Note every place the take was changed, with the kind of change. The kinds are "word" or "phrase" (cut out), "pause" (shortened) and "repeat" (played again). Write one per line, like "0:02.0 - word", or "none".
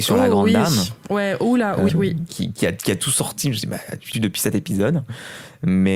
0:01.9 - word
0:04.1 - phrase